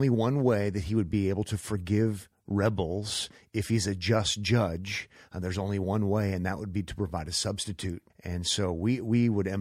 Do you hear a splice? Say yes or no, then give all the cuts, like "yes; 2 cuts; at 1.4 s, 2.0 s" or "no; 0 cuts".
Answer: yes; 1 cut; at 8.1 s